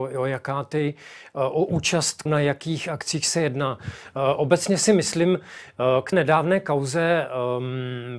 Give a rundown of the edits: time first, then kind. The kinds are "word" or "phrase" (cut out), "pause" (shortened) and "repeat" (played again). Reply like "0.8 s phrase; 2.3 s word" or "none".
2.3 s word; 6.1 s word